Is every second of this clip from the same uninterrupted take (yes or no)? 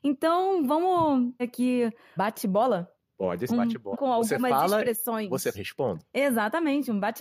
no